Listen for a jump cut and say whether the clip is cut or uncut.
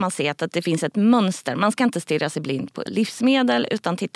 cut